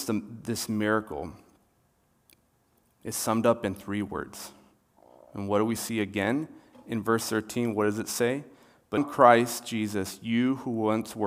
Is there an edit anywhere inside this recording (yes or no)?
yes